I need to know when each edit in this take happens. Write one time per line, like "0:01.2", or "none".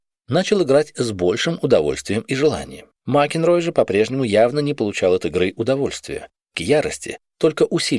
0:03.0
0:06.5